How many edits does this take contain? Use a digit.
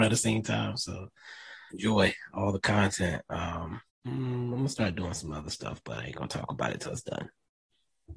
2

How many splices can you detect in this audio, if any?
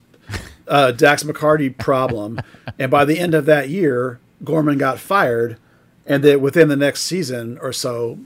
0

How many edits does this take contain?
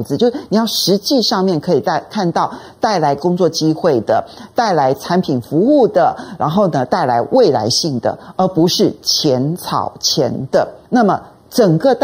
1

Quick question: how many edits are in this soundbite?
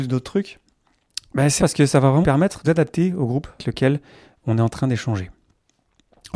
4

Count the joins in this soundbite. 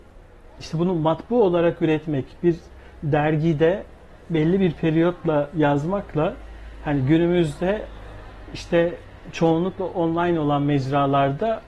0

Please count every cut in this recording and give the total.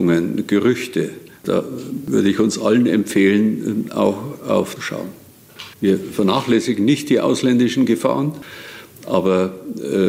3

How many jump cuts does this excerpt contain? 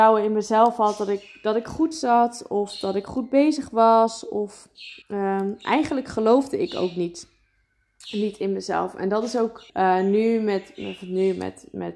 2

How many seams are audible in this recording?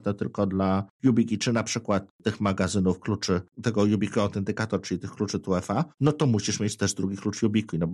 2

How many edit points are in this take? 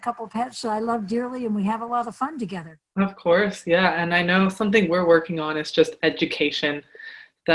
1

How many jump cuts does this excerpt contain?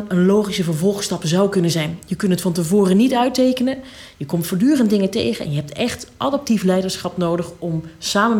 0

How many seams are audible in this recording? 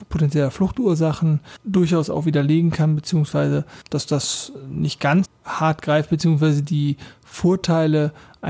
1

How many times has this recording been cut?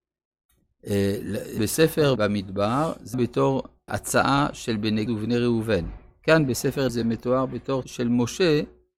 7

